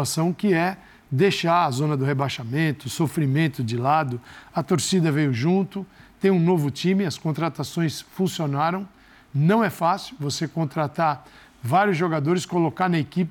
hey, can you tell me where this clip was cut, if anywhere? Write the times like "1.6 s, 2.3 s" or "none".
none